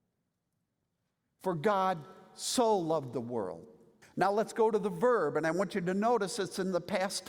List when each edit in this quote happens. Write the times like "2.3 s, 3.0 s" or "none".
4.0 s